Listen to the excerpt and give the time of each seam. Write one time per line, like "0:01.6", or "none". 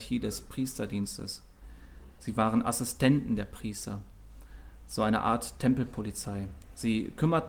none